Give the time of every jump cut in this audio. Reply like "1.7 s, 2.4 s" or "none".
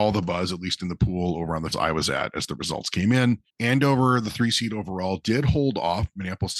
1.7 s, 3.5 s